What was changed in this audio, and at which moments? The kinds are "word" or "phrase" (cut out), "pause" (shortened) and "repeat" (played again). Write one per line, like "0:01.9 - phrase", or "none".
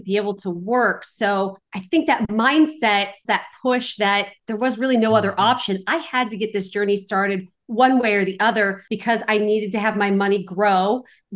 0:03.2 - word